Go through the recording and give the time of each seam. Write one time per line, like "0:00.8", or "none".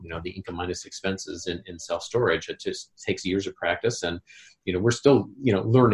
none